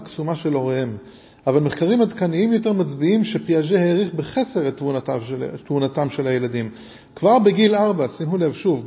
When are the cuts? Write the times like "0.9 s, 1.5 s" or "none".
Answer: none